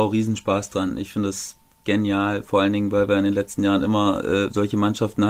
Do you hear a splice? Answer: no; 0 cuts

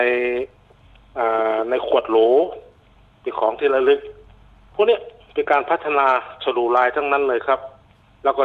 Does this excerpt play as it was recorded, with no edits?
yes; 0 cuts

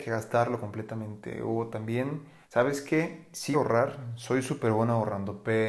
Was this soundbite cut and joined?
yes; 2 cuts; at 2.4 s, 3.5 s

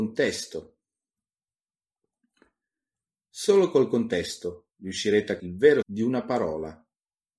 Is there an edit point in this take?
yes; 2 cuts; at 5.4 s, 5.8 s

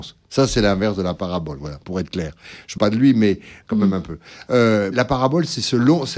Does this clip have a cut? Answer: yes; 3 cuts; at 1.8 s, 2.8 s, 4.9 s

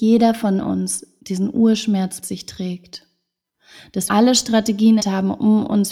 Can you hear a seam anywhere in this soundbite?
yes; 4 cuts; at 1.2 s, 2.2 s, 4.1 s, 5.0 s

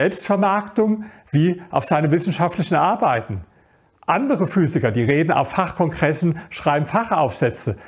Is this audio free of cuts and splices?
yes; 0 cuts

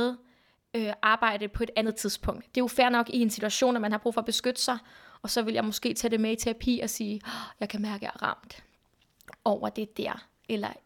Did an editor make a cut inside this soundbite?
no; 0 cuts

